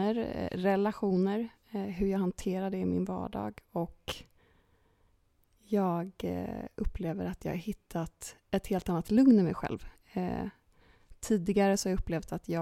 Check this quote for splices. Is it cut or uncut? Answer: uncut